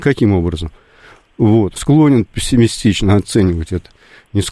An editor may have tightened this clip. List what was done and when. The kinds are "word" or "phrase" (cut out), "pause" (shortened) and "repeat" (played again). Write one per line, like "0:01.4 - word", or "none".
0:01.8 - phrase